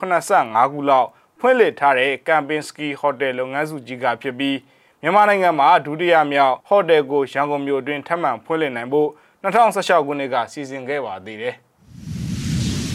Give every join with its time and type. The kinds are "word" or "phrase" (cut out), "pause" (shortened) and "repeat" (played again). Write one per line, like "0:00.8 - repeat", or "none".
0:06.6 - pause